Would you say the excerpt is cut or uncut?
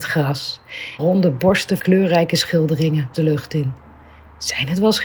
cut